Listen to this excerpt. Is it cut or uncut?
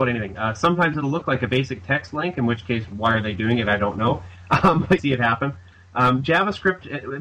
cut